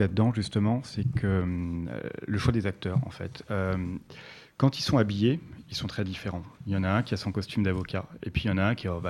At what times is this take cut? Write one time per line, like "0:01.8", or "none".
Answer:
none